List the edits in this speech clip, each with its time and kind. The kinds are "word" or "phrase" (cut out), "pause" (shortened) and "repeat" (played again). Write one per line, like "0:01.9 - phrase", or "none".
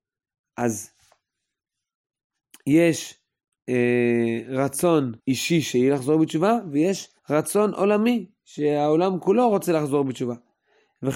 0:05.2 - pause
0:07.2 - pause